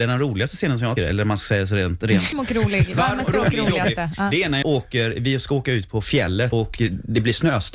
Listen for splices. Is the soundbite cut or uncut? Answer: cut